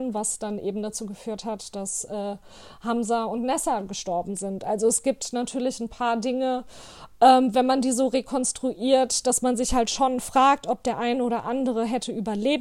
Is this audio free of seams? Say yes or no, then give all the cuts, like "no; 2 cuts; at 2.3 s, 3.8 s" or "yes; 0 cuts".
yes; 0 cuts